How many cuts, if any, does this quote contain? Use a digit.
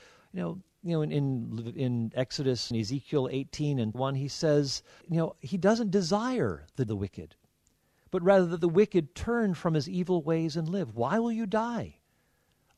4